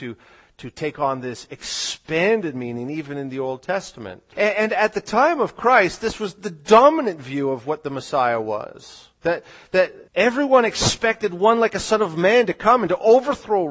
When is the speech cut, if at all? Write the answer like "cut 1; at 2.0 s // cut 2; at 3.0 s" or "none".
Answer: cut 1; at 4.3 s // cut 2; at 9.1 s // cut 3; at 10.1 s